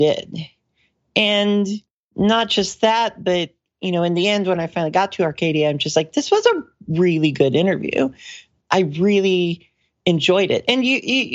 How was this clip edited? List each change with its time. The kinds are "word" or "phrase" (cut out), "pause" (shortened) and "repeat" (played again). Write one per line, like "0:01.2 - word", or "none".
none